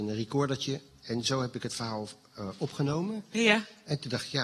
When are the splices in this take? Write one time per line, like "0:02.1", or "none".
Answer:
none